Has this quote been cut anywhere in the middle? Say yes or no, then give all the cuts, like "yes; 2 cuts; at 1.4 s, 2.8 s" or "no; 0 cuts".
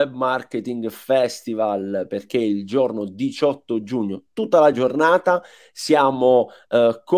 no; 0 cuts